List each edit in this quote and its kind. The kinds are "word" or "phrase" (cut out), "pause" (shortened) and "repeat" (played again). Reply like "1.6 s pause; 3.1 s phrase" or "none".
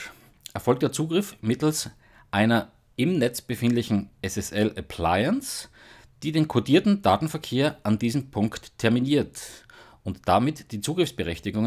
none